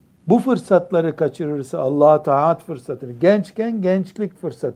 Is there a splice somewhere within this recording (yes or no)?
no